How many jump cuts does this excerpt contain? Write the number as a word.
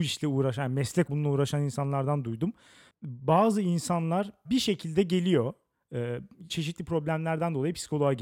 three